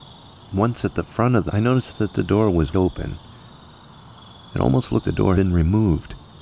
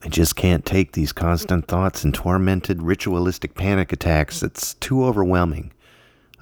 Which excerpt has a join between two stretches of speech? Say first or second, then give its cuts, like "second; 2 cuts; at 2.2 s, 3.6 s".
first; 4 cuts; at 1.5 s, 2.7 s, 5.0 s, 5.3 s